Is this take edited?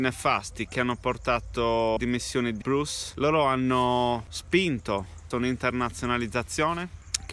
yes; 3 cuts; at 2.0 s, 2.6 s, 5.3 s

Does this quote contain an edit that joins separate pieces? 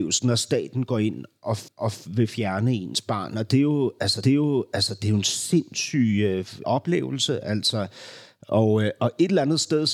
yes; 3 cuts; at 1.7 s, 4.2 s, 6.6 s

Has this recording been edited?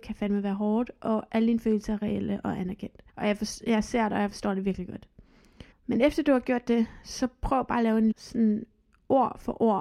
yes; 3 cuts; at 3.1 s, 5.7 s, 8.1 s

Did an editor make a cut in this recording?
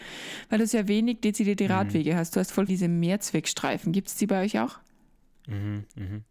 yes; 1 cut; at 2.7 s

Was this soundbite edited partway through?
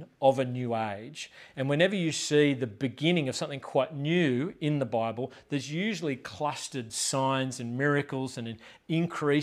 no; 0 cuts

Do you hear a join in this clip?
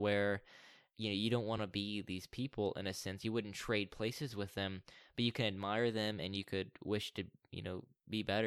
no; 0 cuts

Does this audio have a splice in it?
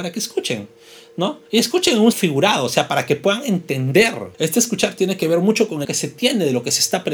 yes; 4 cuts; at 1.5 s, 2.1 s, 4.3 s, 5.8 s

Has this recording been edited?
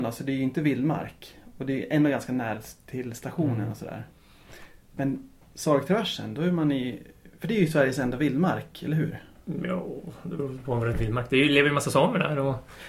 yes; 1 cut; at 10.9 s

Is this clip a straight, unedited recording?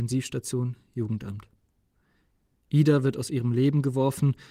yes; 0 cuts

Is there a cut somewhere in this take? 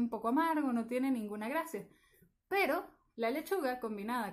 no; 0 cuts

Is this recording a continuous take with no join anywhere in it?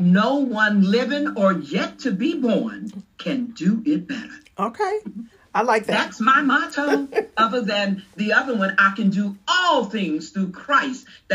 yes; 0 cuts

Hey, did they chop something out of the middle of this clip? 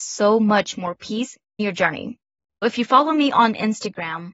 yes; 1 cut; at 1.6 s

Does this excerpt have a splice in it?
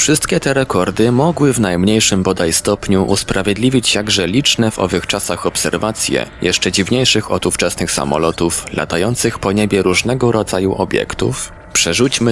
no; 0 cuts

